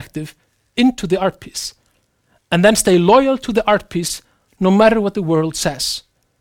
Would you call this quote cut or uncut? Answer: uncut